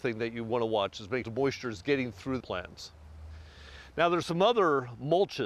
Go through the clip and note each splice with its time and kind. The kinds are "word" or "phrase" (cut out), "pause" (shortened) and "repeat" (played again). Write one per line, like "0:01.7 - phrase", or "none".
0:01.2 - phrase
0:02.4 - phrase